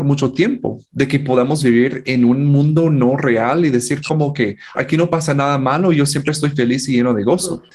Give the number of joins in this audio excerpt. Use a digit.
1